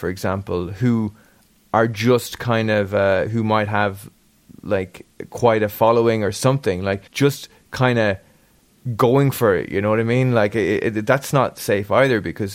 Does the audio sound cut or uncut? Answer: cut